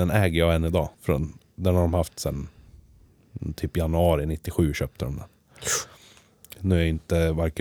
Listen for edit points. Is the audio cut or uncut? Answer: cut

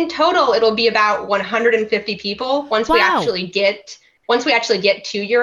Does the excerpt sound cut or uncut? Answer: uncut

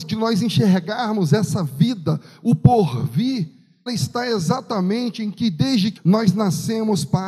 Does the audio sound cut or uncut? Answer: cut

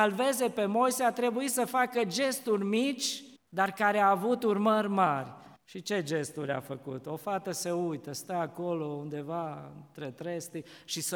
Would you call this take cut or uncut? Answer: cut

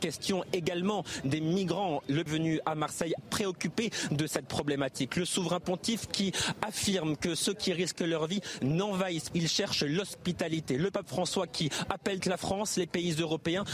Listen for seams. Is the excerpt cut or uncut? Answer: cut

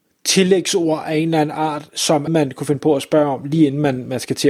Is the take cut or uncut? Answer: cut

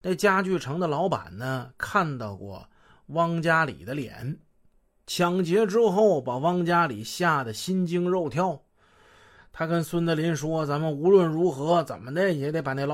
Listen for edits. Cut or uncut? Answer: uncut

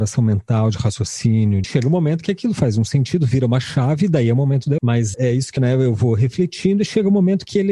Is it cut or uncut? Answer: cut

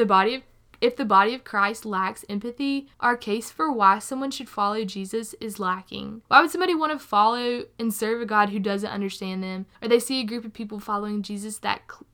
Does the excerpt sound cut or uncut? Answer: cut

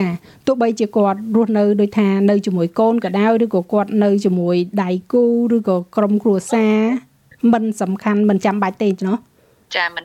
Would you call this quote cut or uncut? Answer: uncut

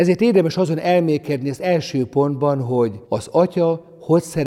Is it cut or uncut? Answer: cut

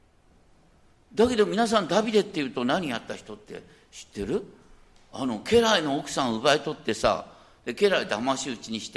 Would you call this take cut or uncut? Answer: uncut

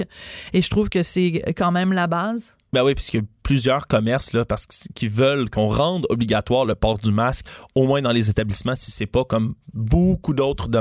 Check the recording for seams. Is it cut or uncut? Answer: uncut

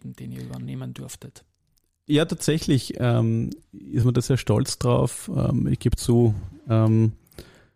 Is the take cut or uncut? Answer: uncut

